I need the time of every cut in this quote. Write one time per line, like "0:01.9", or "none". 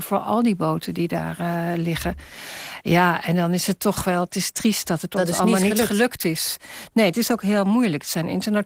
none